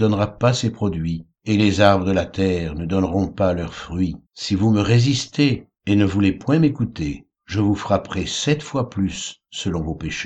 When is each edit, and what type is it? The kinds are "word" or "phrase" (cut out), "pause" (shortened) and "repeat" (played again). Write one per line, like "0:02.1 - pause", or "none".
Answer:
0:01.3 - pause
0:04.2 - pause
0:05.8 - pause
0:07.3 - pause